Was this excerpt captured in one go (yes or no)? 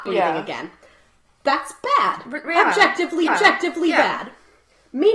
no